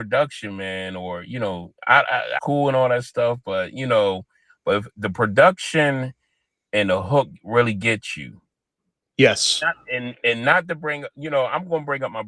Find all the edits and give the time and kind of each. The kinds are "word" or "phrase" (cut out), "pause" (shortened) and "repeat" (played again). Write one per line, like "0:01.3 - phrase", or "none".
0:02.4 - phrase